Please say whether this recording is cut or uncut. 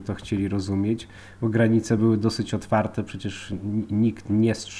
uncut